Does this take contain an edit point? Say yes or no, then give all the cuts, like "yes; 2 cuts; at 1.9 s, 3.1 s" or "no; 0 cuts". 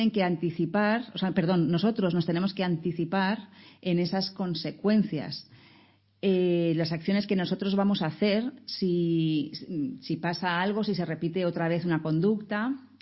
no; 0 cuts